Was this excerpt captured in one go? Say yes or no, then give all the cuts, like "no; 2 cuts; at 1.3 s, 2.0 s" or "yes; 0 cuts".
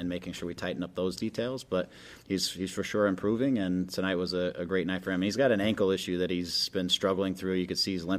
no; 1 cut; at 2.2 s